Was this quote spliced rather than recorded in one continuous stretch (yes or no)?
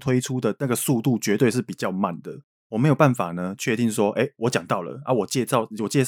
no